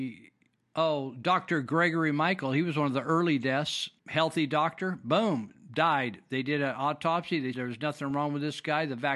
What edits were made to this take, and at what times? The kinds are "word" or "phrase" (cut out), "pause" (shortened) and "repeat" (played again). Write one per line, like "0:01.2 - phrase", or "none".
0:04.0 - pause
0:07.5 - word